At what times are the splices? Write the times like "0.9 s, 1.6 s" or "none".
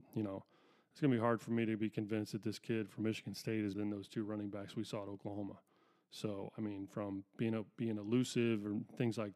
3.7 s

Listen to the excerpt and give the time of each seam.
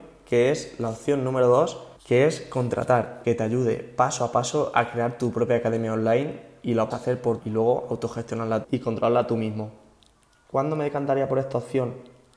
2.0 s, 3.2 s, 6.9 s, 7.4 s, 8.6 s

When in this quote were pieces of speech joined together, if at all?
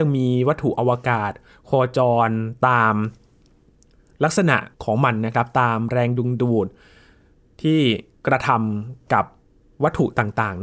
4.7 s

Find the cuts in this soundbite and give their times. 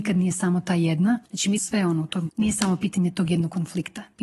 1.2 s, 1.6 s, 2.3 s

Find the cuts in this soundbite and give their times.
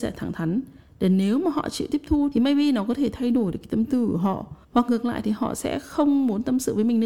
4.6 s

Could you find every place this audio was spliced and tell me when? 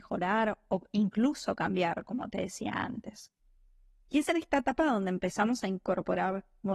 none

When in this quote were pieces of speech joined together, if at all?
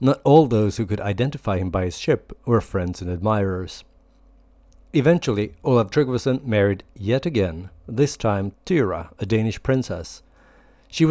8.5 s

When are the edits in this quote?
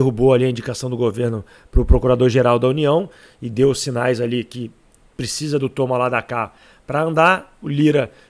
none

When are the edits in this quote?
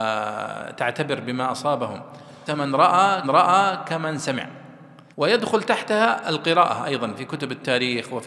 2.5 s, 3.2 s, 5.1 s

